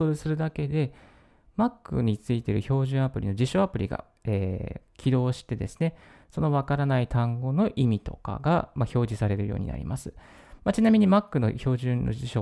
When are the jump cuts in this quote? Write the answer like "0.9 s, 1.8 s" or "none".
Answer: none